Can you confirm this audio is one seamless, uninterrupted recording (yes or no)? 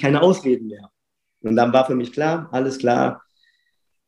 yes